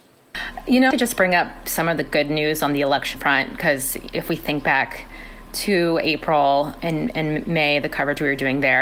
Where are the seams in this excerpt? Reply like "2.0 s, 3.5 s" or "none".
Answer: 0.9 s, 3.1 s, 6.8 s